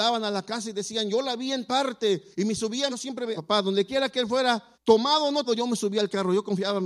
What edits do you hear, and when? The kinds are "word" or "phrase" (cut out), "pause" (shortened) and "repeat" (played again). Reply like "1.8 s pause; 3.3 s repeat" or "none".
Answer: 1.7 s word; 2.3 s pause; 2.9 s word; 3.4 s phrase; 4.7 s pause; 5.5 s word